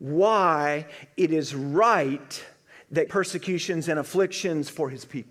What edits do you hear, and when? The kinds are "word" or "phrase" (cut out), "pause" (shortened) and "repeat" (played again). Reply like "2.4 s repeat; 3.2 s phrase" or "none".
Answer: 3.1 s phrase